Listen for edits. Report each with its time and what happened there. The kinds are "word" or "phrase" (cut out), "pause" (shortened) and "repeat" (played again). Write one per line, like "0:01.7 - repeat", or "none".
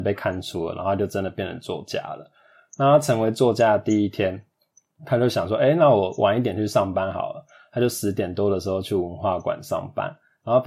none